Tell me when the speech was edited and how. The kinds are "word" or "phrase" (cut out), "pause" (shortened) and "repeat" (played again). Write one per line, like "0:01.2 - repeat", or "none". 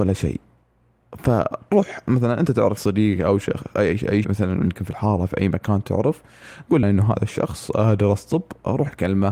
0:02.8 - word
0:04.2 - word
0:06.8 - word